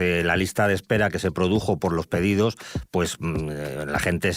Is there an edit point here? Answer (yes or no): no